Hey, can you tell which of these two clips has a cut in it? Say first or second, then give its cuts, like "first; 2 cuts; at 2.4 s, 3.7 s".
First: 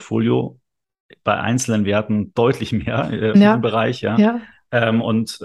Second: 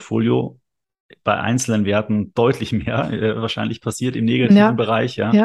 first; 1 cut; at 3.3 s